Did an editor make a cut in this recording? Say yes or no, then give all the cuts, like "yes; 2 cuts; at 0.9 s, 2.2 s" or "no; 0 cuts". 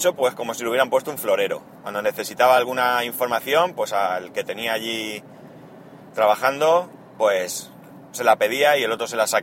no; 0 cuts